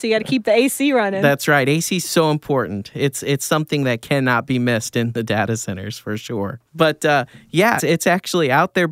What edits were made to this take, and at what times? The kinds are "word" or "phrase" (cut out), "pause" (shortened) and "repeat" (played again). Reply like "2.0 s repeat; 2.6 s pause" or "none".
6.7 s pause; 7.8 s word